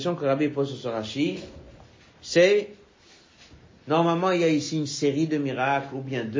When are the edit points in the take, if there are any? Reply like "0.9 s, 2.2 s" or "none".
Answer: none